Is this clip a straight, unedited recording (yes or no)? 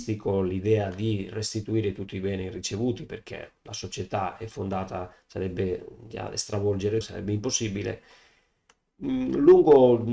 no